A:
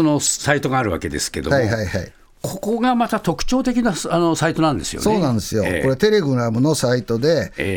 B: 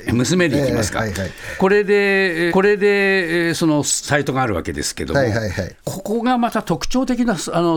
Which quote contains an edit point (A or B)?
B